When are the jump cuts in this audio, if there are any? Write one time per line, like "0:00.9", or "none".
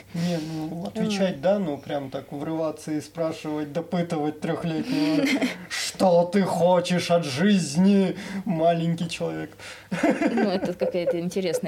none